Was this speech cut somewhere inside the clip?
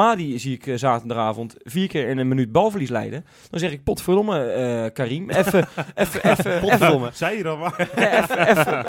no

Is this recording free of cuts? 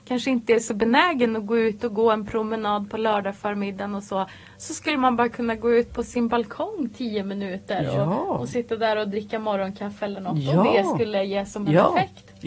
yes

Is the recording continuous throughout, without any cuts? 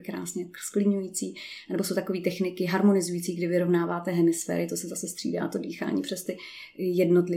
yes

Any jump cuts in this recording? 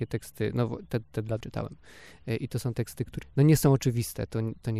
yes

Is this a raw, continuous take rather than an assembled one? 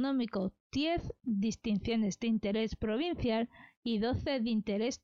yes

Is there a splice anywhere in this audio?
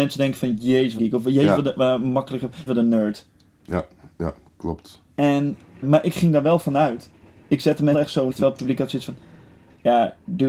yes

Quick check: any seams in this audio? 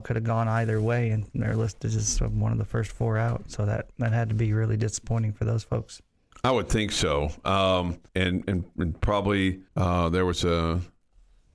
yes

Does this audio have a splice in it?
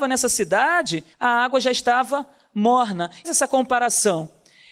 yes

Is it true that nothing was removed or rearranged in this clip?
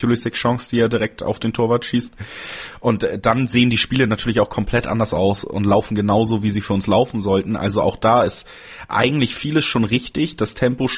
yes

